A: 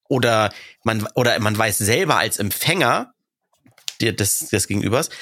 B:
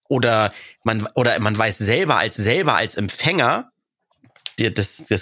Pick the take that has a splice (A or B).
B